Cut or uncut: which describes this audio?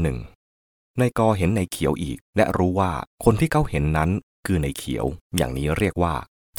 cut